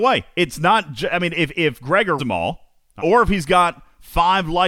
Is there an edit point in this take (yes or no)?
yes